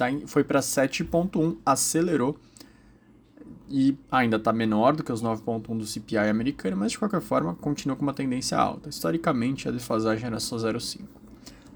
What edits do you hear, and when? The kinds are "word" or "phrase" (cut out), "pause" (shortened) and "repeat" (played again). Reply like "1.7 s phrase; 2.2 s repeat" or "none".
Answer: 4.0 s pause